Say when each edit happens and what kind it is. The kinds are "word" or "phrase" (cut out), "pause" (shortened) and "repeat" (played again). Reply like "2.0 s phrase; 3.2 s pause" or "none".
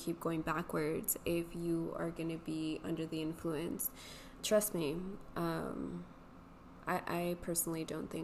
4.4 s word